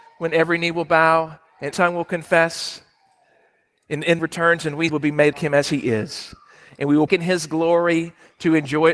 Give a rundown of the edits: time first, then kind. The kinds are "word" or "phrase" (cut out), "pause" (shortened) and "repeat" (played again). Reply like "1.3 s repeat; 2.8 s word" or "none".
1.7 s word; 4.2 s phrase; 4.9 s phrase; 5.3 s word; 7.1 s word

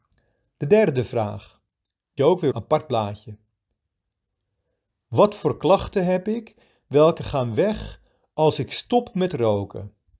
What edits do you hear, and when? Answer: 2.2 s word; 2.5 s phrase

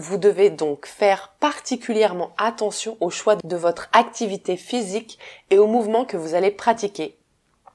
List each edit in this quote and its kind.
none

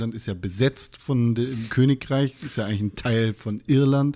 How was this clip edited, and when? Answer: 1.7 s phrase

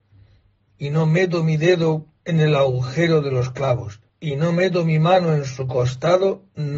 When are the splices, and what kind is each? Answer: 2.2 s pause; 4.1 s pause

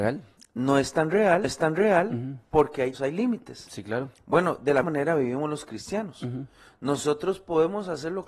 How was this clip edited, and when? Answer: 1.4 s repeat; 2.9 s word; 4.8 s word

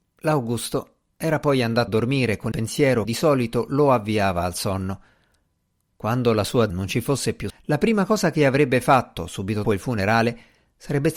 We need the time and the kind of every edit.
1.9 s word; 2.5 s word; 3.0 s word; 6.7 s word; 7.5 s word; 9.6 s word

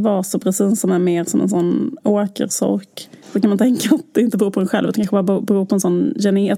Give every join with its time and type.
3.2 s pause

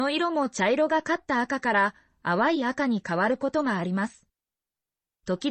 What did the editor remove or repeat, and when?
none

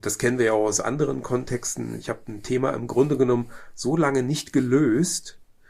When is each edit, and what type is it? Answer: none

